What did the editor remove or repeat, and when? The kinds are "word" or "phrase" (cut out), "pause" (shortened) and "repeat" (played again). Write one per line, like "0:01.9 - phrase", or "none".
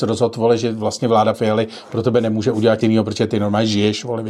0:01.3 - word
0:02.8 - word